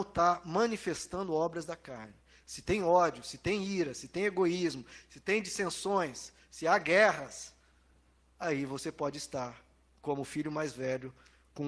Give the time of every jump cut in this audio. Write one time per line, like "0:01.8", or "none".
none